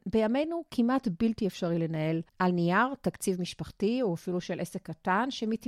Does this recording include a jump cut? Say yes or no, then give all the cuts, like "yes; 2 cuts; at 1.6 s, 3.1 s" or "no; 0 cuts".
yes; 1 cut; at 2.3 s